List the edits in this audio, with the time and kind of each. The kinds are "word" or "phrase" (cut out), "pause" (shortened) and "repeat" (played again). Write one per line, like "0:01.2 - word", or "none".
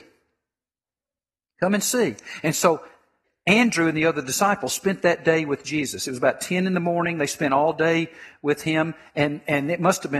none